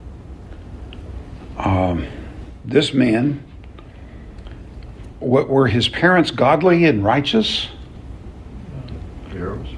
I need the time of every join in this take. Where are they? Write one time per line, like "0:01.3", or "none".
none